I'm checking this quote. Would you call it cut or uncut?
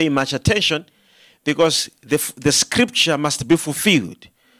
uncut